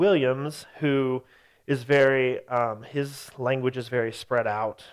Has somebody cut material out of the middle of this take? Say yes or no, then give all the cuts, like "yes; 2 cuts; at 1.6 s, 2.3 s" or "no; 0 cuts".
no; 0 cuts